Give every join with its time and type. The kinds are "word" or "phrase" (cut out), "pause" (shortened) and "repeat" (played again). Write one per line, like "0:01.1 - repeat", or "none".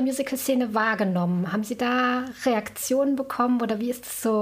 none